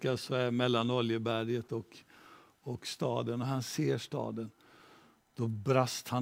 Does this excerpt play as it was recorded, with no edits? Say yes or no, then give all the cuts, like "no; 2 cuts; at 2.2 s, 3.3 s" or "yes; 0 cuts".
yes; 0 cuts